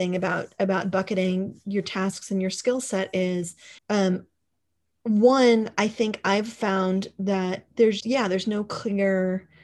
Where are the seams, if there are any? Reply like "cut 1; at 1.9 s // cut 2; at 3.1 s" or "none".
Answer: cut 1; at 3.8 s // cut 2; at 8.0 s